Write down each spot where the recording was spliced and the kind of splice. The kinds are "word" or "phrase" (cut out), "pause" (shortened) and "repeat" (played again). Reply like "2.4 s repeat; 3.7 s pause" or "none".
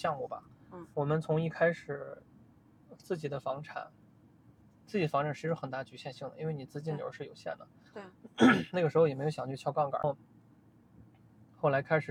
0.9 s pause

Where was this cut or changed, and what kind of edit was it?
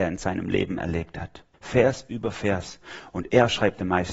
1.5 s pause

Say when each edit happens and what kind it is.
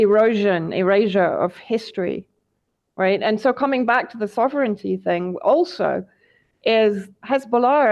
none

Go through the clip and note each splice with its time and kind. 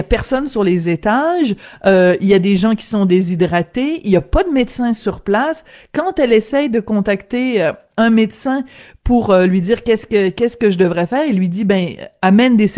none

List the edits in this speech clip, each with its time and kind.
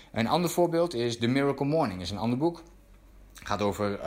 none

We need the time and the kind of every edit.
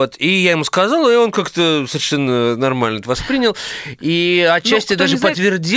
none

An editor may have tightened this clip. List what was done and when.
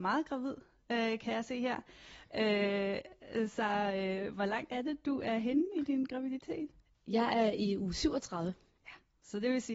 none

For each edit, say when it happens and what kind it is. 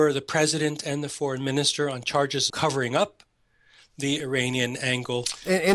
2.5 s word

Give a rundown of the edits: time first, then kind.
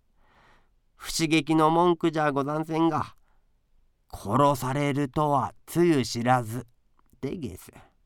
none

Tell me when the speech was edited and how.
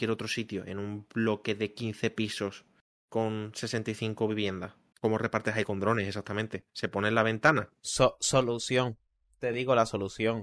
4.9 s pause

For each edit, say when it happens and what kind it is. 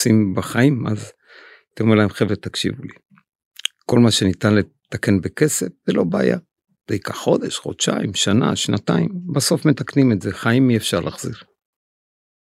none

